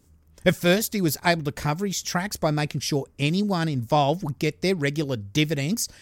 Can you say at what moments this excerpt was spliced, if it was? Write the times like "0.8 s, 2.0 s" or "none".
none